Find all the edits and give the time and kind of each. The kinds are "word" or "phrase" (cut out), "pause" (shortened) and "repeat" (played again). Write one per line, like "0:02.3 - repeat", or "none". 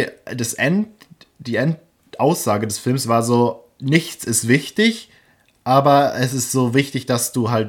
none

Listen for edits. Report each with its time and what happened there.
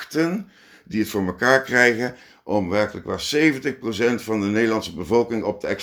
none

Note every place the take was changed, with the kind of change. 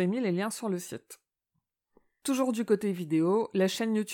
none

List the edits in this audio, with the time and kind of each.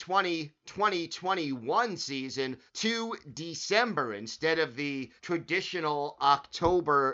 0:02.7 - pause
0:05.2 - pause

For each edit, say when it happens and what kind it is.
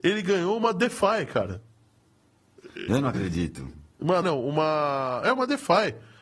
0:04.2 - word

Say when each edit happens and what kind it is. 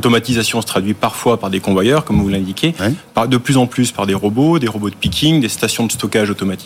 none

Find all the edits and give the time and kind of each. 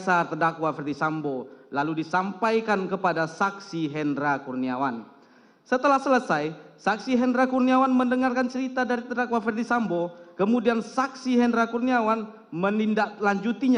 none

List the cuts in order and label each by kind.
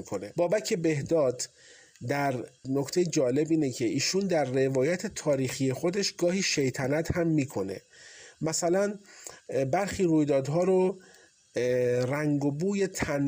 none

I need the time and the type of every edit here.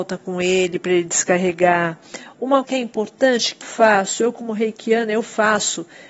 0:02.6 - word
0:03.6 - word

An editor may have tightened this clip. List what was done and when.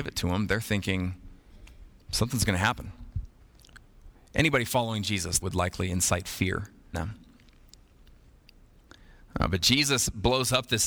0:05.4 - word
0:06.9 - word

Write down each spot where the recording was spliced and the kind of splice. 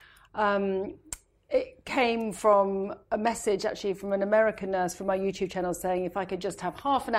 none

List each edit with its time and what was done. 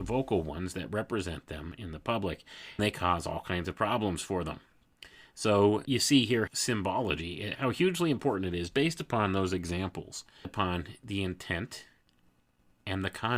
0:02.8 - word
0:05.8 - word
0:06.5 - word
0:07.6 - word
0:08.7 - word
0:10.4 - word

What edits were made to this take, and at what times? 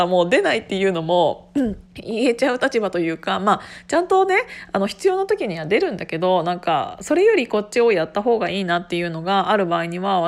0:01.9 - pause

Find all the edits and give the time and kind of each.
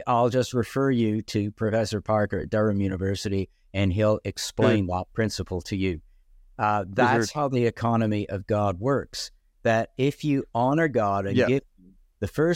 none

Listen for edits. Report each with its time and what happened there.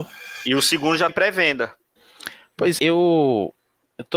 0:01.1 - word
0:02.8 - word

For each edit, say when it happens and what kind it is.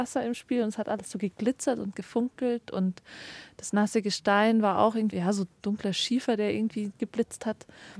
0:05.1 - word
0:07.0 - word

